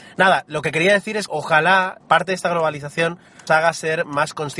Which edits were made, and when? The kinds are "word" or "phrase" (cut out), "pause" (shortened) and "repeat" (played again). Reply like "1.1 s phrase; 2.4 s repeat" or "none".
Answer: 1.3 s word; 2.0 s word; 3.5 s word